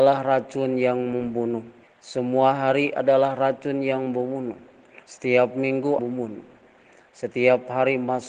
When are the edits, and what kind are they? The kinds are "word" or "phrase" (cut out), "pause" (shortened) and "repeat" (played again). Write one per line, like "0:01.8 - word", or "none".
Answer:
0:01.8 - pause
0:05.0 - pause
0:06.0 - phrase